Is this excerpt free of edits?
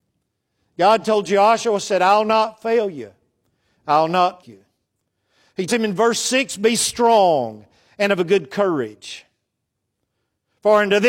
no; 2 cuts; at 4.4 s, 5.7 s

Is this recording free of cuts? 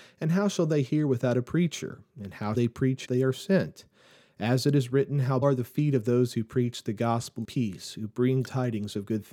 no; 5 cuts; at 2.5 s, 3.0 s, 5.4 s, 7.4 s, 8.4 s

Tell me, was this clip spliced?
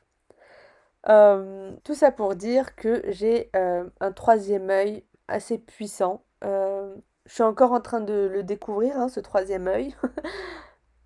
yes; 1 cut; at 1.8 s

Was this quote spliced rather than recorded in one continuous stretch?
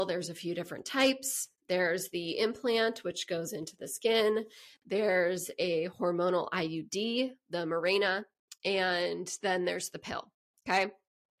no; 0 cuts

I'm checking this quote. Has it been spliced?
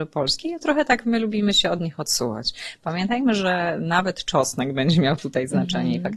no; 0 cuts

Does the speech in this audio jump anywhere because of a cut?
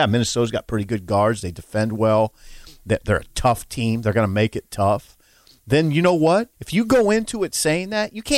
yes; 1 cut; at 6.5 s

